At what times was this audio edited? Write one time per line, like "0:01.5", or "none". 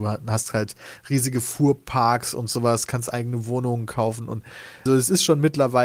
0:04.9